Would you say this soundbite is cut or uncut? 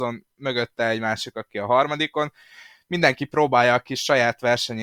uncut